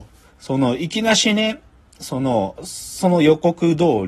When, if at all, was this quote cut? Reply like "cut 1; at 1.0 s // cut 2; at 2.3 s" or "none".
none